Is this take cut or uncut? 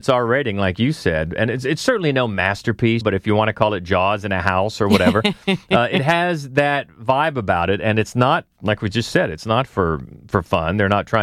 uncut